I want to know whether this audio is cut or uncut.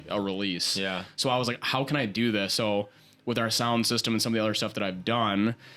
uncut